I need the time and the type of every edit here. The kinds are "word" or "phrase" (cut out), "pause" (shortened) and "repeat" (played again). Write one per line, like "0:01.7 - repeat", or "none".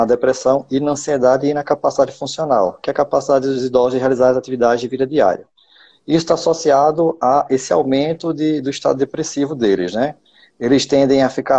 none